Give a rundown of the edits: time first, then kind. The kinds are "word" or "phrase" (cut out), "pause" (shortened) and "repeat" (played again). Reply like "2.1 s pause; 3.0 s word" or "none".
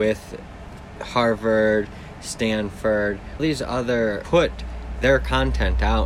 3.4 s word; 4.2 s phrase